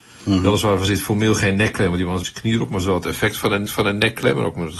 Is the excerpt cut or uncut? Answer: cut